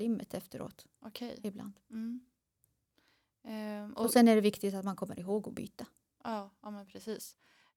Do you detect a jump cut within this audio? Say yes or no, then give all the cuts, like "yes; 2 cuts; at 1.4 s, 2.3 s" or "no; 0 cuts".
no; 0 cuts